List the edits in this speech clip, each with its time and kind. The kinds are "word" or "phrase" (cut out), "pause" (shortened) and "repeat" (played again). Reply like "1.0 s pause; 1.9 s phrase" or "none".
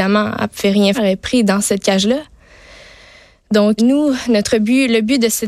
0.9 s word; 3.8 s word